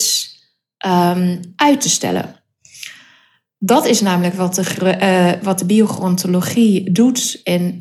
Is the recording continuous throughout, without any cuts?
yes; 0 cuts

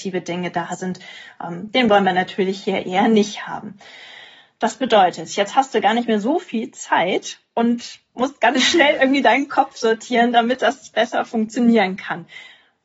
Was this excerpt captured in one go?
yes; 0 cuts

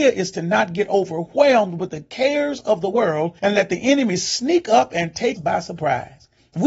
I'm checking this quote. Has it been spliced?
yes; 2 cuts; at 3.4 s, 5.4 s

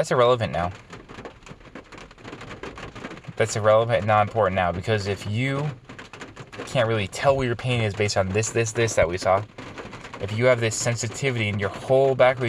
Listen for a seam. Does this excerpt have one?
no; 0 cuts

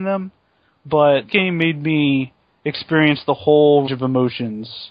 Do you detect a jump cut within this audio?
yes; 2 cuts; at 1.3 s, 3.9 s

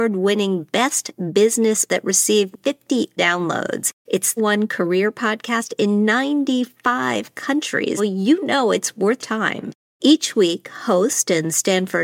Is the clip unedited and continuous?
no; 6 cuts; at 1.9 s, 2.5 s, 3.2 s, 4.4 s, 8.0 s, 9.2 s

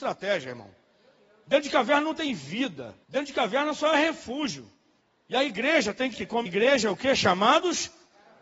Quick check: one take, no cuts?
no; 4 cuts; at 3.0 s, 5.0 s, 6.1 s, 6.5 s

